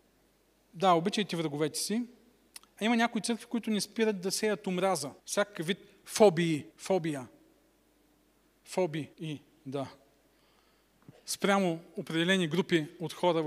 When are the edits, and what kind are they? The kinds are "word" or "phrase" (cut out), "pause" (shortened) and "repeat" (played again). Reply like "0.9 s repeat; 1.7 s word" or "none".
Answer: 2.5 s pause; 5.2 s pause; 6.7 s pause; 9.1 s pause; 11.2 s pause